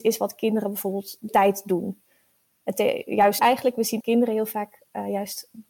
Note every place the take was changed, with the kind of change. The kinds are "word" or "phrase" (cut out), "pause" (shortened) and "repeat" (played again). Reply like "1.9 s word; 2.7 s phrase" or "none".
1.3 s word; 3.4 s word; 4.0 s word